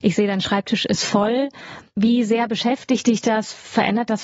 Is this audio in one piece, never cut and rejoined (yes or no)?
yes